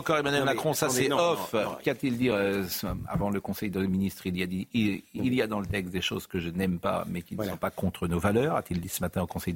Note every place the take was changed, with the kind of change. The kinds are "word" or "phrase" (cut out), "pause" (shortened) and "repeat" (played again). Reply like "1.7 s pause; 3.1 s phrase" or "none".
none